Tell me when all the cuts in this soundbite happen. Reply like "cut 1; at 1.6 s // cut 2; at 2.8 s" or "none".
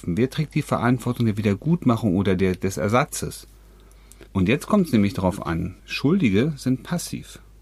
cut 1; at 4.3 s // cut 2; at 5.8 s